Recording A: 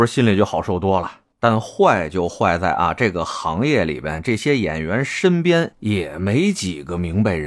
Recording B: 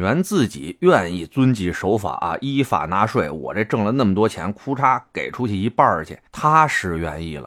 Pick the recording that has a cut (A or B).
B